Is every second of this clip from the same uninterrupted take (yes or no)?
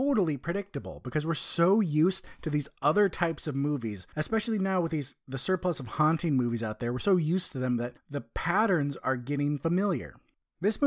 yes